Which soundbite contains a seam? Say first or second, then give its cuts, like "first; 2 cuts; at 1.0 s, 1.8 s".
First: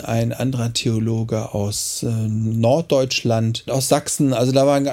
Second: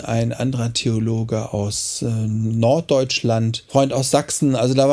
first; 1 cut; at 3.7 s